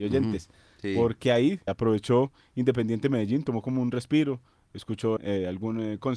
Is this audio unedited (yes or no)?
no